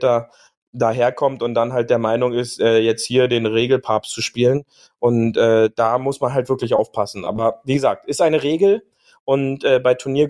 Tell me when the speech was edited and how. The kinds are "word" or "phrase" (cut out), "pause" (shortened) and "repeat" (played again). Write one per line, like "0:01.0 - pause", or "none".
none